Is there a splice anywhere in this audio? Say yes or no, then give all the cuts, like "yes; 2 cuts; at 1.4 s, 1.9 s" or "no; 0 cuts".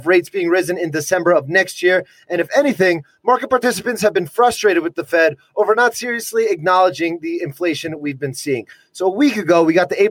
no; 0 cuts